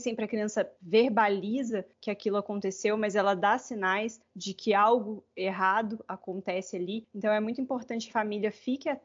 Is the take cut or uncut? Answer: cut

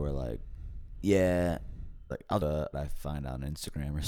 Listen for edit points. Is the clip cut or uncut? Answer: cut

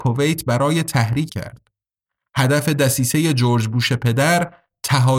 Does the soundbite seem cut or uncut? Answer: cut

